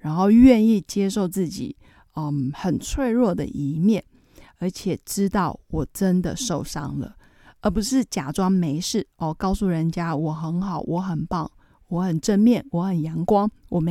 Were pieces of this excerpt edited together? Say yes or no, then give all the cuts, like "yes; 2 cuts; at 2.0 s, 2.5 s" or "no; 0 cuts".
no; 0 cuts